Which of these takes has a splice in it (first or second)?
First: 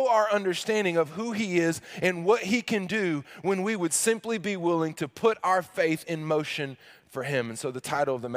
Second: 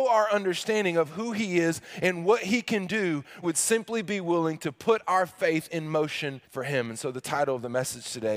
second